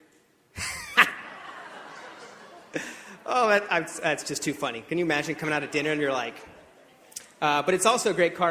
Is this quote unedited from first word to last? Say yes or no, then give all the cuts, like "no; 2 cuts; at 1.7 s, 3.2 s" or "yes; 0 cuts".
yes; 0 cuts